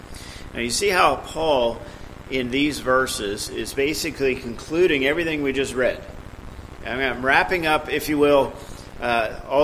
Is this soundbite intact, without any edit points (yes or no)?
yes